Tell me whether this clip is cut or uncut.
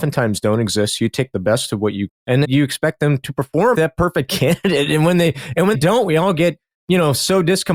cut